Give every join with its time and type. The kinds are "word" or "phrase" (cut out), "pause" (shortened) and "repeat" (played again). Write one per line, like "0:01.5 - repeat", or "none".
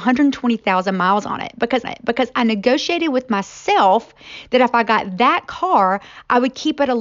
0:01.8 - repeat